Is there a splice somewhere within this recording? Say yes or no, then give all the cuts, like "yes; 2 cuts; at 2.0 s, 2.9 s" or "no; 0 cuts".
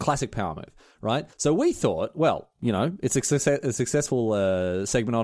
yes; 1 cut; at 1.3 s